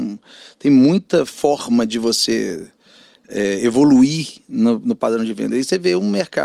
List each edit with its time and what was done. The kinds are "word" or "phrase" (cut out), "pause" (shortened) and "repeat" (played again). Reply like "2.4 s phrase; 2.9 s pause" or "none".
none